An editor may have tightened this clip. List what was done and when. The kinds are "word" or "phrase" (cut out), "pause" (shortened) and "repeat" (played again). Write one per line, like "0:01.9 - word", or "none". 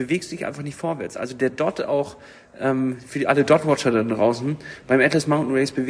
none